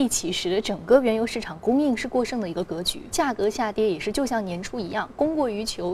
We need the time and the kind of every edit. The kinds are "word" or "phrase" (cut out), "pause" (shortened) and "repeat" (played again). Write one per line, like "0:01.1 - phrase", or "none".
0:03.1 - word